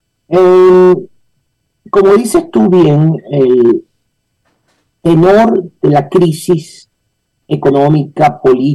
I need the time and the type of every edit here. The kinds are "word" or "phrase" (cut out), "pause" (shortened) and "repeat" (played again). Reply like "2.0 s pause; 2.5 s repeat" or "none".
none